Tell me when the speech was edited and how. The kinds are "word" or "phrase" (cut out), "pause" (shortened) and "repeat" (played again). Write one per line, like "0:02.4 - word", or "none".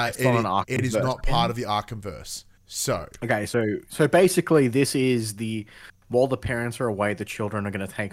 0:02.6 - pause